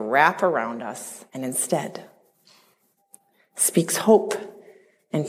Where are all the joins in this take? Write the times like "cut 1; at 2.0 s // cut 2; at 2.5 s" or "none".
cut 1; at 1.3 s